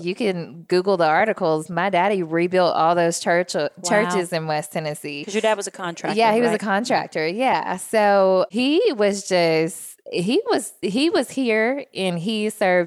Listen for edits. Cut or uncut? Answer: uncut